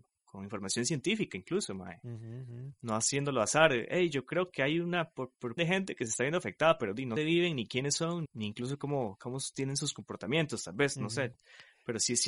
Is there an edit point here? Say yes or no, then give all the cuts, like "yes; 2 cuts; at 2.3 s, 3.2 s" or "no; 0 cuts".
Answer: yes; 3 cuts; at 5.6 s, 7.2 s, 8.3 s